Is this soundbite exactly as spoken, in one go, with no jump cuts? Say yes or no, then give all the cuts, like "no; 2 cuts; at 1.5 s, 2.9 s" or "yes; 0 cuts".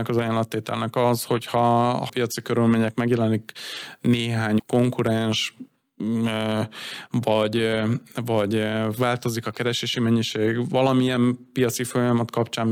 no; 2 cuts; at 2.1 s, 4.6 s